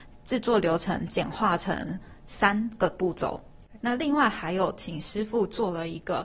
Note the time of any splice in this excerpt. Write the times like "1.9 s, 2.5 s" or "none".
3.8 s